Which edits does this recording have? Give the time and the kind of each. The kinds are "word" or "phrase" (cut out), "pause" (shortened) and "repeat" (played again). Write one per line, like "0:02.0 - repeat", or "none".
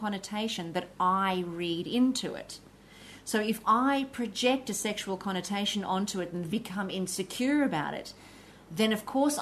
0:06.5 - word